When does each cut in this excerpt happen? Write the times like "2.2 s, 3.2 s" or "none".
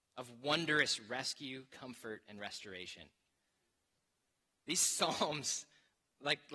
none